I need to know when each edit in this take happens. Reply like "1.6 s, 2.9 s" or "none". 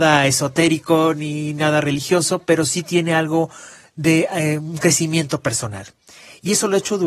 none

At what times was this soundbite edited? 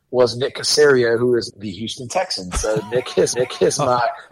1.5 s, 3.3 s

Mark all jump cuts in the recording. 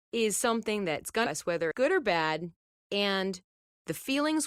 1.3 s, 1.7 s, 2.8 s

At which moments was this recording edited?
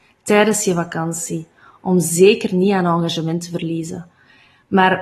none

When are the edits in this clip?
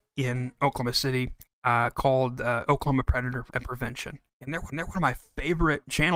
1.5 s, 3.5 s, 4.3 s, 4.7 s

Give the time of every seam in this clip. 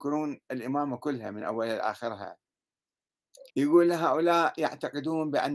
3.5 s

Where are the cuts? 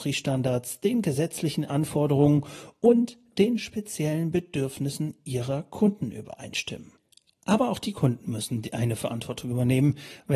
none

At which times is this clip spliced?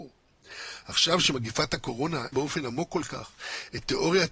2.3 s

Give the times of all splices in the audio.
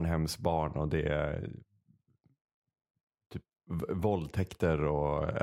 none

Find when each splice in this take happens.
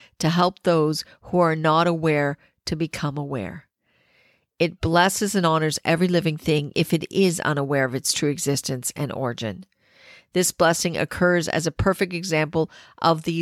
6.7 s

